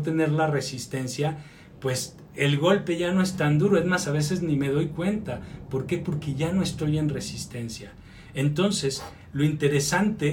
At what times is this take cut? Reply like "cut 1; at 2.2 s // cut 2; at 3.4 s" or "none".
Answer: none